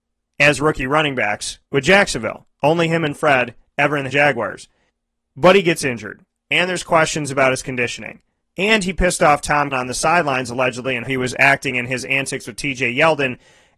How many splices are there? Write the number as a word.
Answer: eight